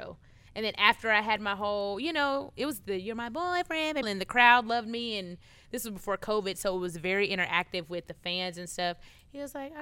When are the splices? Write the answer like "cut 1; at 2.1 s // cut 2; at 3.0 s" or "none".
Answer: cut 1; at 4.0 s